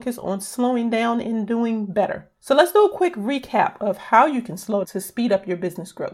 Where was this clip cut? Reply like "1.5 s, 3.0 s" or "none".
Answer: 1.2 s, 2.4 s, 4.8 s

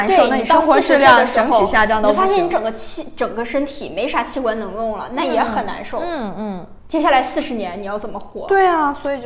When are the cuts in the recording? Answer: 6.8 s

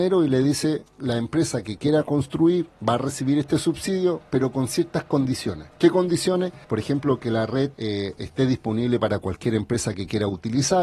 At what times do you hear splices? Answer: 5.7 s, 6.6 s, 7.7 s

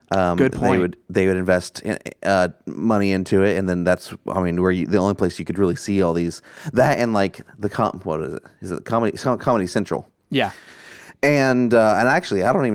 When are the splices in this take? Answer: none

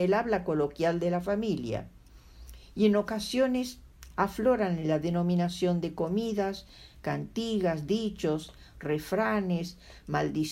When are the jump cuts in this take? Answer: none

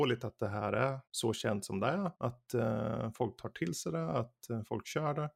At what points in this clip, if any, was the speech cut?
1.1 s, 2.1 s

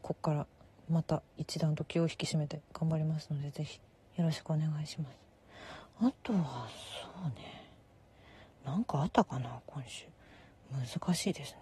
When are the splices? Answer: 3.9 s

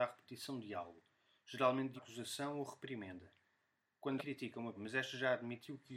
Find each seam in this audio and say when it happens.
2.0 s, 4.2 s, 4.7 s

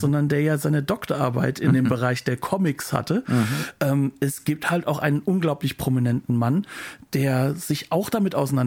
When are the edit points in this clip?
none

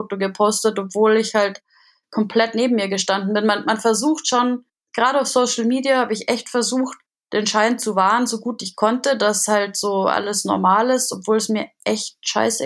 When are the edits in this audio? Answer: none

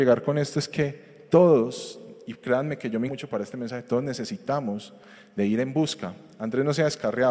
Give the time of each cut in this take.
3.1 s

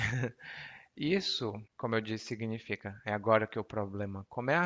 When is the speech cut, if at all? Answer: 1.7 s

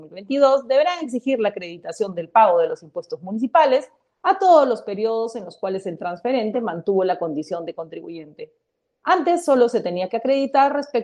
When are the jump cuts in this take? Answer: none

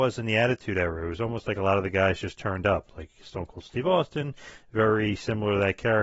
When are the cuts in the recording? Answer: none

